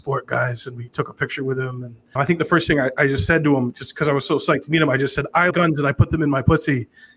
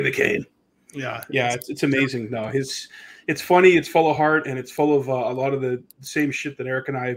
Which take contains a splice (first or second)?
first